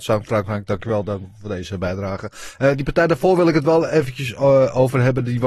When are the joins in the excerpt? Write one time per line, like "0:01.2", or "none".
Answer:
none